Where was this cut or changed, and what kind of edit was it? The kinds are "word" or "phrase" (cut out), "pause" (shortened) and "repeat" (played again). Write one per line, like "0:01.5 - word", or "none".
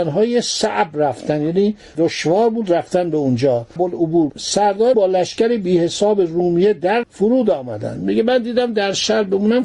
0:03.8 - word
0:04.3 - word
0:04.9 - word
0:07.0 - word